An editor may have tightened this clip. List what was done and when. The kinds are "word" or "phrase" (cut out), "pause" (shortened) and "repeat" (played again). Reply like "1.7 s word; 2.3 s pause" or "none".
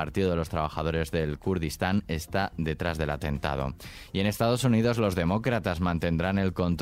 none